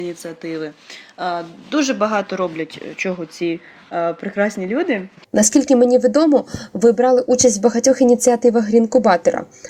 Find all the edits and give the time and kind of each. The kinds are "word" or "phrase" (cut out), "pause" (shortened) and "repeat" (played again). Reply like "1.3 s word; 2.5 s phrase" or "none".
none